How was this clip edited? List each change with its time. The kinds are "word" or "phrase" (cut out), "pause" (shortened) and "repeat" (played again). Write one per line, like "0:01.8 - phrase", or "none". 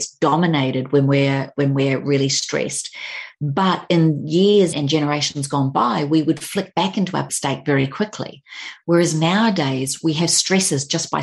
0:04.7 - word
0:07.3 - word